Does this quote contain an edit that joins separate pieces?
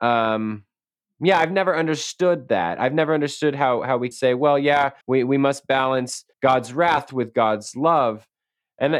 yes; 3 cuts; at 4.1 s, 5.0 s, 6.3 s

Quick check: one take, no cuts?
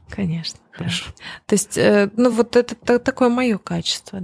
yes; 0 cuts

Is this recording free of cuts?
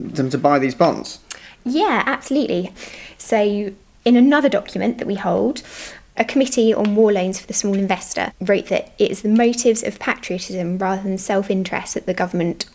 yes; 0 cuts

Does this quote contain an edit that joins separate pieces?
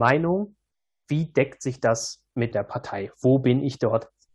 yes; 1 cut; at 2.5 s

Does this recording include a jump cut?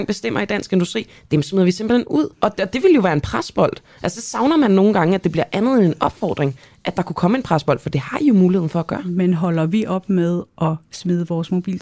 yes; 1 cut; at 2.3 s

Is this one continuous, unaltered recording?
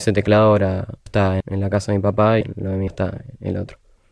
no; 4 cuts; at 1.1 s, 1.4 s, 2.4 s, 2.9 s

